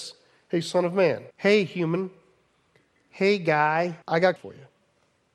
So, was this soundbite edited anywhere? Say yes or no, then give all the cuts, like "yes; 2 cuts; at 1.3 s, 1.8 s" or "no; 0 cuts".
yes; 3 cuts; at 1.3 s, 4.0 s, 4.4 s